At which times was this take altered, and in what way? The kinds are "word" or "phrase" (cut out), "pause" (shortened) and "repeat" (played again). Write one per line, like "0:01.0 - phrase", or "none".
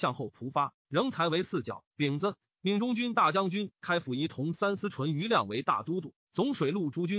0:01.9 - pause